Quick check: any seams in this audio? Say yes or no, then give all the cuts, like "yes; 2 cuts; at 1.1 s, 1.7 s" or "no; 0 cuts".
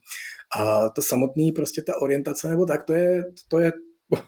no; 0 cuts